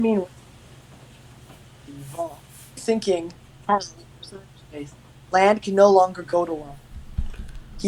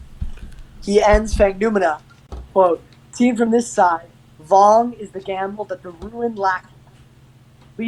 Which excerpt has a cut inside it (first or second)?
first